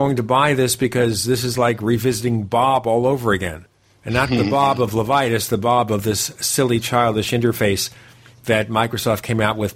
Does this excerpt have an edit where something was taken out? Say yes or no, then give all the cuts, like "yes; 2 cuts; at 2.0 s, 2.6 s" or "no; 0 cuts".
no; 0 cuts